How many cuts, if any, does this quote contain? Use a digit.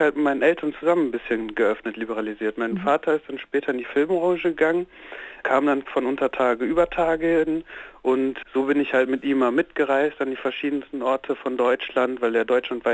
1